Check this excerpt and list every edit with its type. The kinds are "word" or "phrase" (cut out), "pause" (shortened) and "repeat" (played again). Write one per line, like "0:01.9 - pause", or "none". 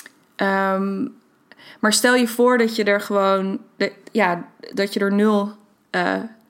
none